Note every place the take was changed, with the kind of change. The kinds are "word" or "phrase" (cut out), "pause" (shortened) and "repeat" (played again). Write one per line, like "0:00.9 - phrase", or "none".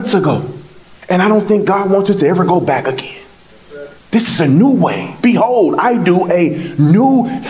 0:04.0 - pause